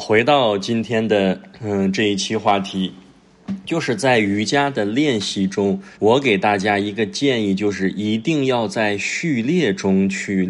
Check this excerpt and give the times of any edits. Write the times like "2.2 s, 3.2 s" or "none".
5.9 s